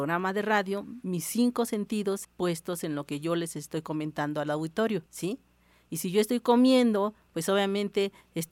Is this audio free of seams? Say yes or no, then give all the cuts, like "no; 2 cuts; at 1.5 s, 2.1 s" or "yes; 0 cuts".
no; 2 cuts; at 2.2 s, 5.1 s